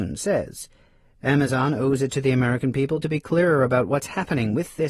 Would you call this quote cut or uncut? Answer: uncut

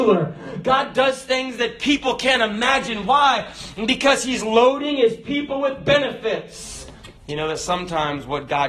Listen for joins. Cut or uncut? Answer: cut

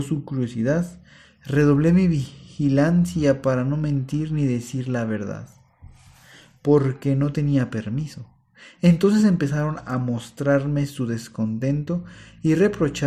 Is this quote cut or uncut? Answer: uncut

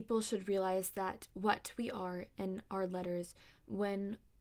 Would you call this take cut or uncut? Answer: uncut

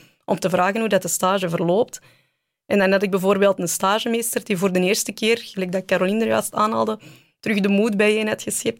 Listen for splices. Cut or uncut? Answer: uncut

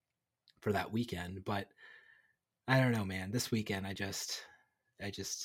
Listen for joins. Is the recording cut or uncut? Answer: uncut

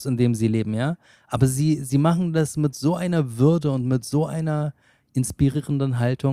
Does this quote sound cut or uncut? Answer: uncut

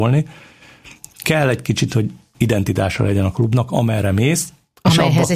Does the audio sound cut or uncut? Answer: cut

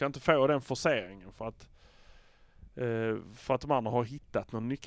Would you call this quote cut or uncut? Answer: uncut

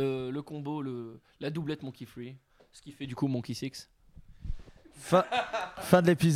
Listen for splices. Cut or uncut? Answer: uncut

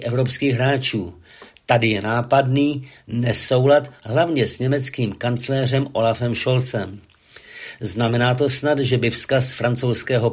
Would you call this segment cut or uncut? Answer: uncut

